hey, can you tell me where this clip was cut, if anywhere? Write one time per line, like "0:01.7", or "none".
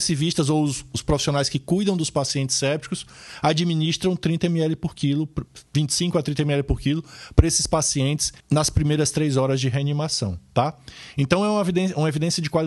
0:05.7
0:08.4